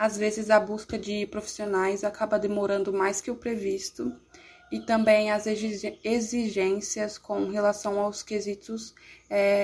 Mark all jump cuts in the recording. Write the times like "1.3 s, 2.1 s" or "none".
none